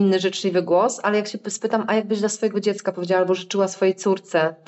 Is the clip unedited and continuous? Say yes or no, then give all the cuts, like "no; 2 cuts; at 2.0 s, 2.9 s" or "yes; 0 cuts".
yes; 0 cuts